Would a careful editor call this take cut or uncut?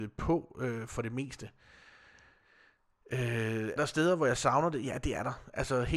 cut